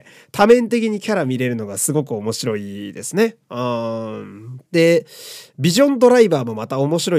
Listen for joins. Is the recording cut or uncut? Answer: cut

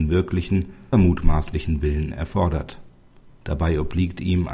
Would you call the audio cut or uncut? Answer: cut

